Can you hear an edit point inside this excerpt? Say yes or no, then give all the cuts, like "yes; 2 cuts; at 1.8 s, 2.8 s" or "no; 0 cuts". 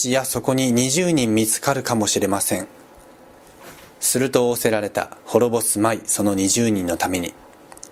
yes; 1 cut; at 5.2 s